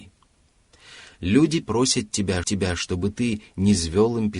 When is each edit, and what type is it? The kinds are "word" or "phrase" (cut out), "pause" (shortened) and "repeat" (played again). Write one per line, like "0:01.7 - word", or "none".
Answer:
0:01.6 - word
0:02.4 - repeat